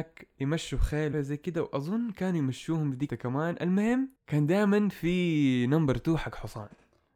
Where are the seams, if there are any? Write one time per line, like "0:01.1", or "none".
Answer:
0:01.1
0:03.1
0:04.2